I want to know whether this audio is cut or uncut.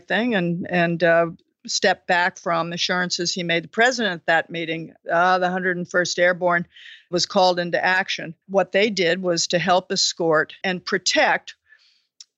cut